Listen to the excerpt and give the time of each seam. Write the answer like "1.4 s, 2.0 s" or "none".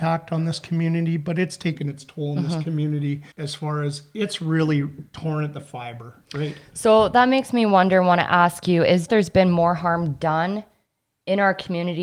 3.3 s, 9.1 s